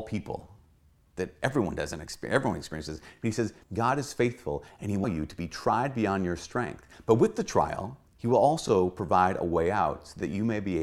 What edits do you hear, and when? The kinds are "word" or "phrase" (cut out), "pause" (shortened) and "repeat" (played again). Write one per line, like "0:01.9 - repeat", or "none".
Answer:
0:03.6 - pause
0:05.0 - phrase
0:08.1 - pause